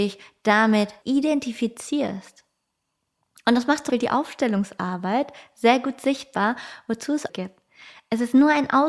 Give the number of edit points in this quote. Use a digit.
4